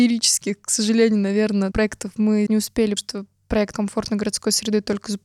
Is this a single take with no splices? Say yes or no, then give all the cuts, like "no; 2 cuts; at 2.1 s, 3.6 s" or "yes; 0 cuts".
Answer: no; 4 cuts; at 1.7 s, 2.5 s, 3.0 s, 3.7 s